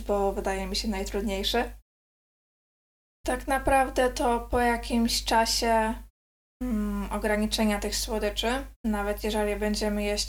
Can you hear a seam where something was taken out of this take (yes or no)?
no